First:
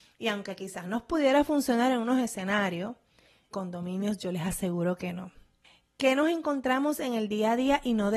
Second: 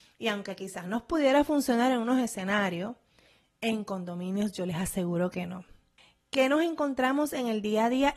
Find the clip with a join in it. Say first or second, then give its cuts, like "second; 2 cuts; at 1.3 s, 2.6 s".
first; 1 cut; at 3.5 s